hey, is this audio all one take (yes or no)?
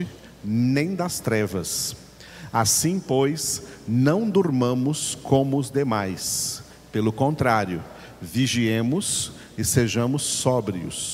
yes